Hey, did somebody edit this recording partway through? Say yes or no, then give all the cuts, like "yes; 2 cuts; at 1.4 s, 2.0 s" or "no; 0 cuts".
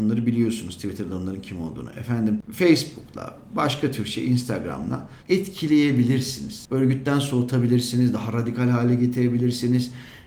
yes; 1 cut; at 5.2 s